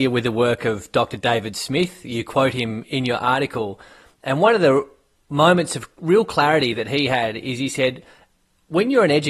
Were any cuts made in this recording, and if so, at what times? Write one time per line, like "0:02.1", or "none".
none